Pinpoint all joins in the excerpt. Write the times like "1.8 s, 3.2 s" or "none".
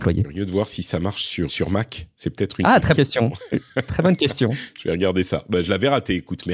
1.5 s, 3.0 s

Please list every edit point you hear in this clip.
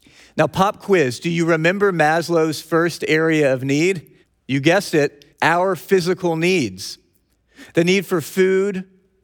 4.2 s, 5.3 s

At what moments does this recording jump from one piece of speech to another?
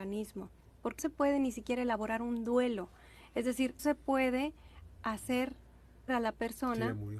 1.0 s, 3.8 s, 6.1 s

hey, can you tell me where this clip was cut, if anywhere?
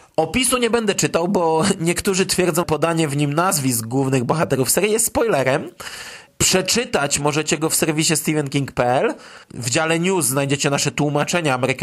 2.6 s, 9.4 s

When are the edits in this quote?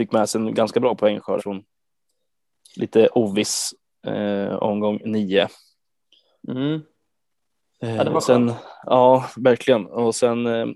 1.4 s

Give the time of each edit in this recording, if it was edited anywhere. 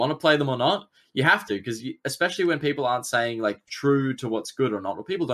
none

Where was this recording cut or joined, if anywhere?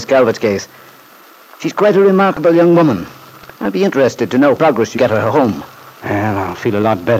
3.6 s, 4.6 s, 5.0 s, 5.9 s

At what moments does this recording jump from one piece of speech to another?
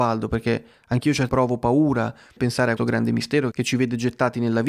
1.3 s, 2.4 s, 2.8 s, 3.5 s

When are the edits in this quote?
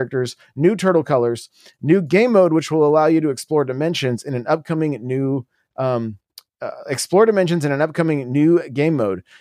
none

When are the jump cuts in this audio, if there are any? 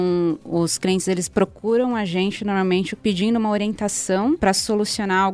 none

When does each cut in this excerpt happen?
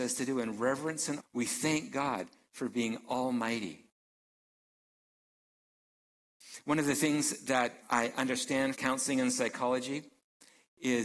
1.2 s, 7.8 s, 8.7 s

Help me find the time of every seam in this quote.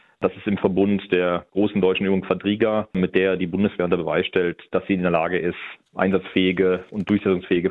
2.9 s

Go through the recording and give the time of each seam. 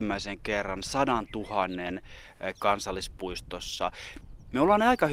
2.5 s

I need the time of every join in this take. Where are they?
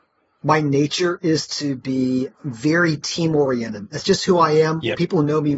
2.3 s

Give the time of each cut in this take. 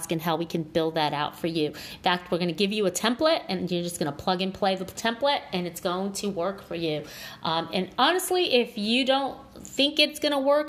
none

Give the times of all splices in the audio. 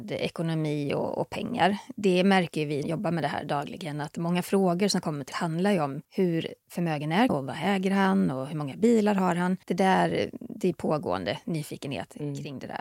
2.8 s, 5.3 s, 6.0 s, 7.3 s, 9.6 s

